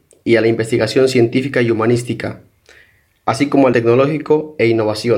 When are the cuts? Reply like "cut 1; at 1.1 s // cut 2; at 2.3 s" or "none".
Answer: cut 1; at 3.7 s